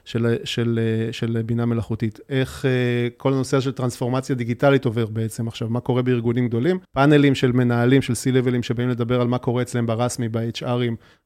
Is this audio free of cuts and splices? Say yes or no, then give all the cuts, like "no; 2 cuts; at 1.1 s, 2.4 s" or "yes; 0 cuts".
no; 1 cut; at 6.8 s